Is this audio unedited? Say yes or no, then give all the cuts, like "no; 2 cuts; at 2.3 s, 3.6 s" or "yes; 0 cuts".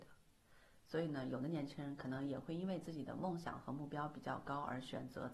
yes; 0 cuts